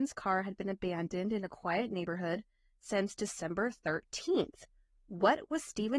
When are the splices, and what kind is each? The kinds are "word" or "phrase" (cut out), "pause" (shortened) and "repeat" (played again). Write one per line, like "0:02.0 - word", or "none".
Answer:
none